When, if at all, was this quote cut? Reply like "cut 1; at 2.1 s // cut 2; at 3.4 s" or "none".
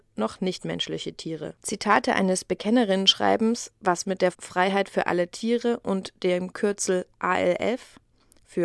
cut 1; at 3.8 s // cut 2; at 4.3 s